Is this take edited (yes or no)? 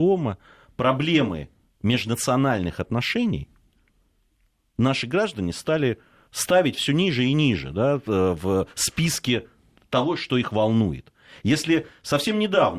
no